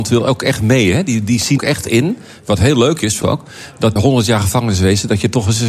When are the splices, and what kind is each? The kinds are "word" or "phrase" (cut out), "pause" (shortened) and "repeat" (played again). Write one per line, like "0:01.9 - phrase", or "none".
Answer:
0:01.6 - word
0:03.2 - word
0:04.0 - word